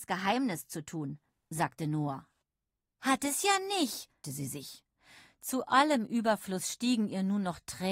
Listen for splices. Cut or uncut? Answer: cut